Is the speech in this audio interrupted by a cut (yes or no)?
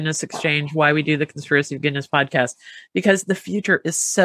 no